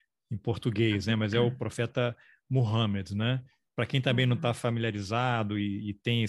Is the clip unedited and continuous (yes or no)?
yes